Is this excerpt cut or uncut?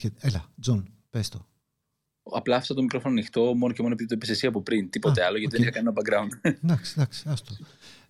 uncut